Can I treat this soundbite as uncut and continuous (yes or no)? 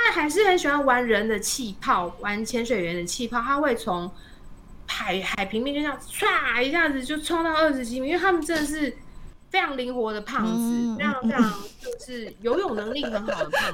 yes